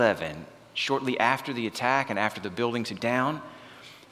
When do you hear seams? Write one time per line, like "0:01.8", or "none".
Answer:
0:03.0